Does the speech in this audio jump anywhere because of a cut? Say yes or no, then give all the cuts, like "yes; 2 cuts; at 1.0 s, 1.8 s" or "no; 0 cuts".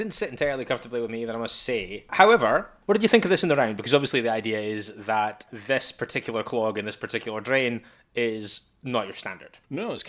no; 0 cuts